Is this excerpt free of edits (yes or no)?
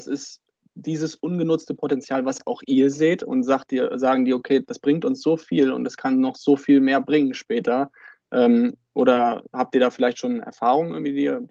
yes